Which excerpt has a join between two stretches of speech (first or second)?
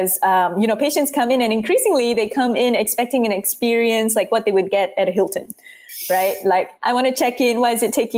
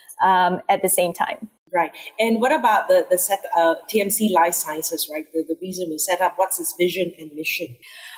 first